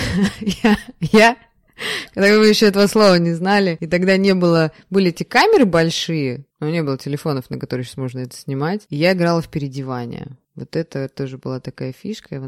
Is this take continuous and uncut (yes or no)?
no